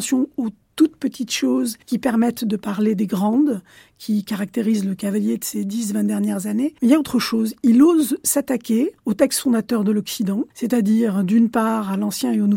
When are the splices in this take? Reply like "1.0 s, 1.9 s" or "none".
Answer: 1.8 s, 6.8 s, 9.0 s, 10.5 s